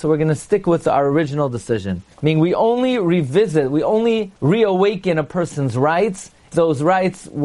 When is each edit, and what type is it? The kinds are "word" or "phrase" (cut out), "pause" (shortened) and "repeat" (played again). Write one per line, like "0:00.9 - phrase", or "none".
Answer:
0:02.1 - pause
0:04.4 - pause
0:06.5 - word